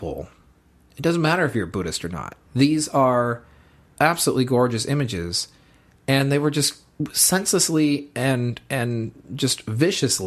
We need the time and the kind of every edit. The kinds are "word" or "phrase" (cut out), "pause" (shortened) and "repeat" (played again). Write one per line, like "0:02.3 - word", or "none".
none